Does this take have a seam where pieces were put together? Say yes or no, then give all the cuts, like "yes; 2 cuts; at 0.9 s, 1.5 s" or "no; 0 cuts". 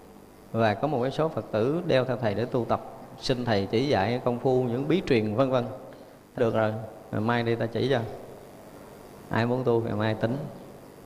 yes; 1 cut; at 6.4 s